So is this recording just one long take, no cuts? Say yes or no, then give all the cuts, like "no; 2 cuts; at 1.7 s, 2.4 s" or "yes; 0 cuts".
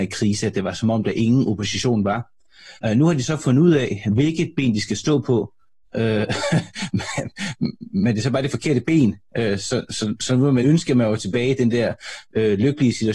no; 2 cuts; at 2.8 s, 10.6 s